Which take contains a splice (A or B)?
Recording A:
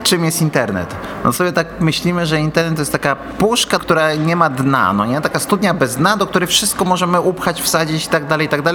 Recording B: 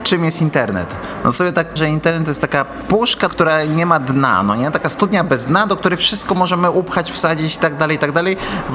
B